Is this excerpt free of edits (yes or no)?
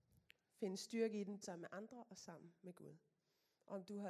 no